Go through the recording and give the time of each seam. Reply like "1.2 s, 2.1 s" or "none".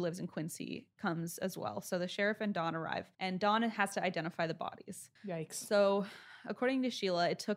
0.9 s, 3.1 s, 5.2 s